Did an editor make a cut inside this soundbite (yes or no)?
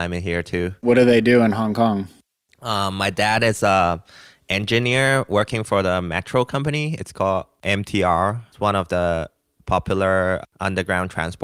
no